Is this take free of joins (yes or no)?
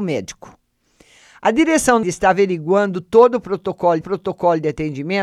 no